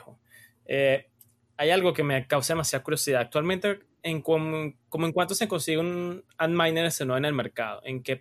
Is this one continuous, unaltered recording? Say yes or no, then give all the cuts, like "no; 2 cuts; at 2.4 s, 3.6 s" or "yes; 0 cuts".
yes; 0 cuts